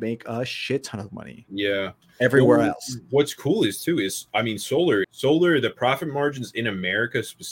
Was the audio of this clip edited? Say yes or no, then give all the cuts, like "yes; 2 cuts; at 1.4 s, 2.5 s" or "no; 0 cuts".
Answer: yes; 1 cut; at 5.0 s